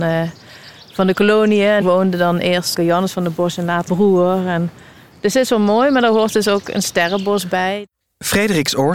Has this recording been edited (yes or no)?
yes